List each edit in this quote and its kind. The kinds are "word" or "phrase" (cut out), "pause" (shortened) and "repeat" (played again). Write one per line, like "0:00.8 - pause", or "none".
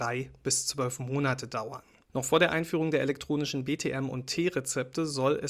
none